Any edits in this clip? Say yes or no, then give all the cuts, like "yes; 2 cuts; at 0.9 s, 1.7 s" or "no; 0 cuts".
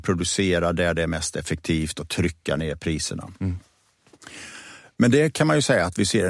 no; 0 cuts